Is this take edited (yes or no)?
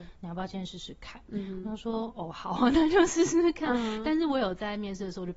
no